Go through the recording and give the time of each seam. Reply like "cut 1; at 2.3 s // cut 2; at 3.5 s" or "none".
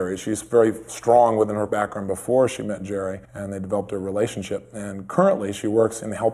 cut 1; at 1.7 s // cut 2; at 3.2 s